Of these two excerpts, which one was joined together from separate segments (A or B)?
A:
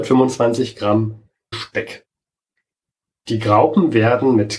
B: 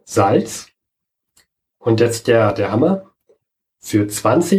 A